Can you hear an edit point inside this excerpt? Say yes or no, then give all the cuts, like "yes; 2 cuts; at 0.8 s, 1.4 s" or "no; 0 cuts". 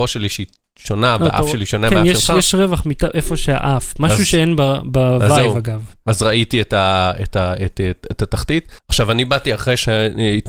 yes; 1 cut; at 8.8 s